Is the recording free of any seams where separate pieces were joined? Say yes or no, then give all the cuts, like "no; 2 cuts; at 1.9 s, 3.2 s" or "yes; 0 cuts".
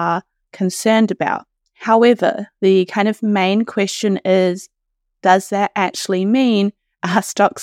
yes; 0 cuts